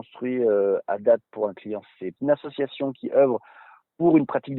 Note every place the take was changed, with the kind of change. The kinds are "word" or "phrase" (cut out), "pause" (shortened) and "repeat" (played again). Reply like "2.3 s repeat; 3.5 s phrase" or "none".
2.2 s phrase